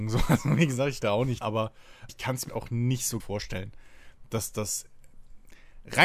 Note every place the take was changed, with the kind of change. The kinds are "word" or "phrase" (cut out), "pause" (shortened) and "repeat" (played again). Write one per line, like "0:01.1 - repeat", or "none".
0:01.0 - word
0:01.4 - word
0:02.1 - word
0:02.5 - word
0:03.2 - word
0:04.5 - word